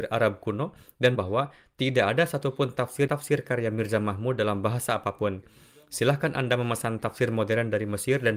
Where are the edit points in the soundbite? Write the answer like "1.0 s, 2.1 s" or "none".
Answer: 1.1 s, 3.1 s